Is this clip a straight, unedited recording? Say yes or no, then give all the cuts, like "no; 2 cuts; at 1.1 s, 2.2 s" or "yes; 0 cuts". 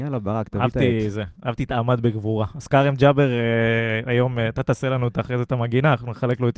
yes; 0 cuts